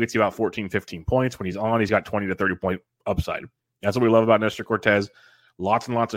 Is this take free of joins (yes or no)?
yes